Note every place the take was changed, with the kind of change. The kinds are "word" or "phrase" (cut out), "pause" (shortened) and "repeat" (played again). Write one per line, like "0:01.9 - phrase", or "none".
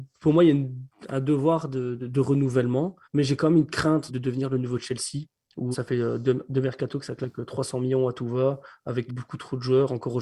0:02.0 - word
0:03.0 - pause
0:04.1 - word
0:05.7 - word
0:09.1 - word